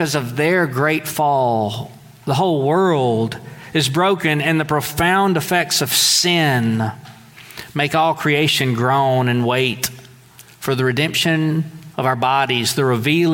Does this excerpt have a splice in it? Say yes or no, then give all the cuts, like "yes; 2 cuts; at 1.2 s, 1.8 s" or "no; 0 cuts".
no; 0 cuts